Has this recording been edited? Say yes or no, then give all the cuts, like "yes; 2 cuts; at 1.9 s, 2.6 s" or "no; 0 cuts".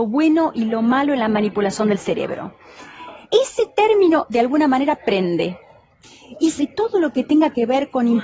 yes; 2 cuts; at 3.2 s, 6.6 s